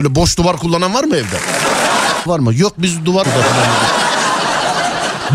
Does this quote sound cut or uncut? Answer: cut